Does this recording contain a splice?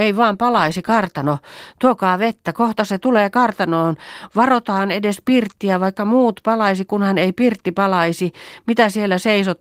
no; 0 cuts

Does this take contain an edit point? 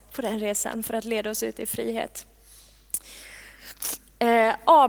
no; 0 cuts

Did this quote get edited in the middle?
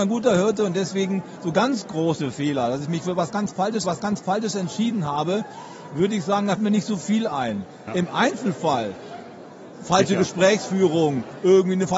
yes; 2 cuts; at 3.8 s, 6.6 s

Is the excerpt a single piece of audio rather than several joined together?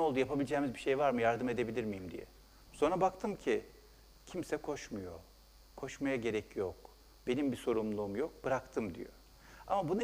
yes; 0 cuts

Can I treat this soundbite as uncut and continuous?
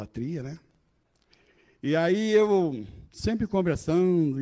no; 1 cut; at 3.1 s

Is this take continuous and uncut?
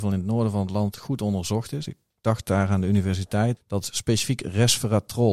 no; 1 cut; at 3.6 s

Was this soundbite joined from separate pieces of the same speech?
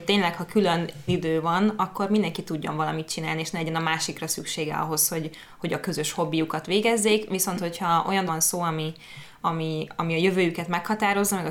yes; 2 cuts; at 1.1 s, 8.3 s

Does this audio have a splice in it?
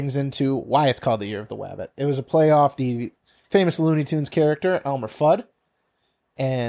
no; 0 cuts

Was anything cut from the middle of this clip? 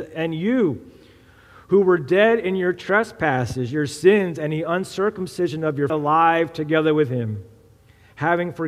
yes; 1 cut; at 5.9 s

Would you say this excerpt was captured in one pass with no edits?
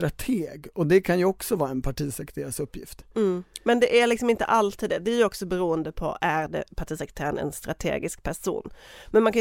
yes; 0 cuts

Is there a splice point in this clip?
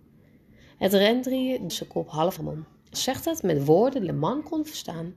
yes; 4 cuts; at 1.7 s, 2.4 s, 2.9 s, 4.1 s

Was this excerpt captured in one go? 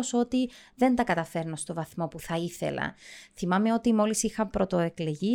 yes; 0 cuts

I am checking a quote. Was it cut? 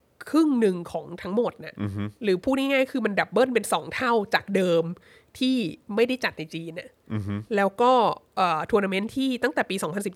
no; 0 cuts

